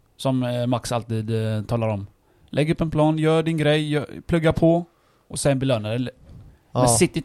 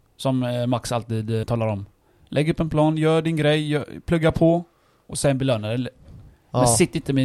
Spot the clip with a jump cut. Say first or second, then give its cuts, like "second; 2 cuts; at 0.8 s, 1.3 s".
second; 1 cut; at 1.4 s